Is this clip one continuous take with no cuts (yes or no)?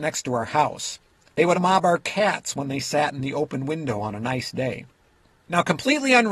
no